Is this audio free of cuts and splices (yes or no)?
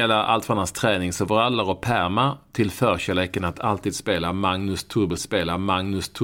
no